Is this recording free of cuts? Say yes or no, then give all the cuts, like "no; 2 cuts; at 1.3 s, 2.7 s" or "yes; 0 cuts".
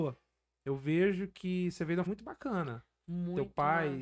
no; 1 cut; at 2.1 s